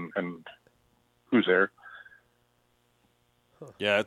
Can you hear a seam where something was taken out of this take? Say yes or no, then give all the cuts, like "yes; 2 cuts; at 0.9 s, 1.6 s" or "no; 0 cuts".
yes; 1 cut; at 1.5 s